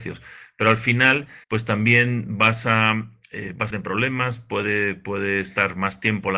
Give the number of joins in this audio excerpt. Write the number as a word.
two